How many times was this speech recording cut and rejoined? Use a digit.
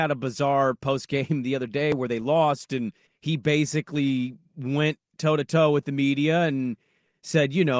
1